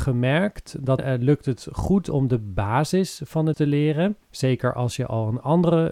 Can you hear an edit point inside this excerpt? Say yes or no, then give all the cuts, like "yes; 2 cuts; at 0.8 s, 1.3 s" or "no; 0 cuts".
yes; 3 cuts; at 1.0 s, 3.5 s, 4.2 s